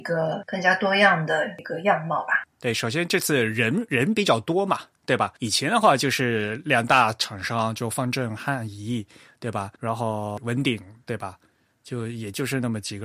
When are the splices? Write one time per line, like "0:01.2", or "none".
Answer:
0:05.4
0:09.8